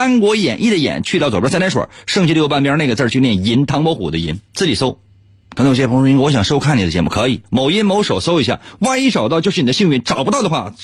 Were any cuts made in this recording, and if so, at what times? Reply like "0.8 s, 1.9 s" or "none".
3.7 s, 4.5 s, 5.1 s, 7.4 s